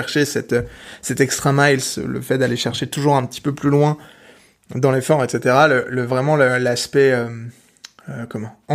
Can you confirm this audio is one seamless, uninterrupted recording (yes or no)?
yes